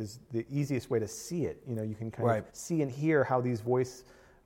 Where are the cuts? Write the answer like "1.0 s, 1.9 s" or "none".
2.5 s